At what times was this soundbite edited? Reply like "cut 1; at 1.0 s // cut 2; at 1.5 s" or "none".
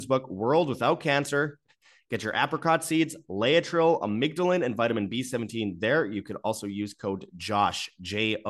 none